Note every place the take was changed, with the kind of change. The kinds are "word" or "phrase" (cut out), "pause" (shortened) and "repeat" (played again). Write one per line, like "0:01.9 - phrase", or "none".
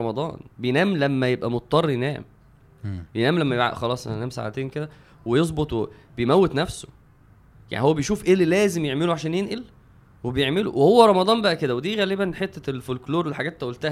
none